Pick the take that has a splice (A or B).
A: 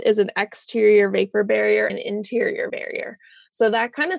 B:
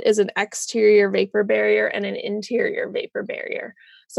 A